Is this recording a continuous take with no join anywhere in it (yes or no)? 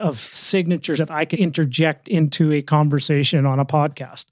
no